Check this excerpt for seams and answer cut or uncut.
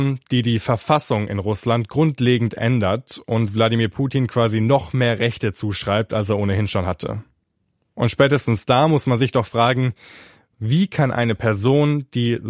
uncut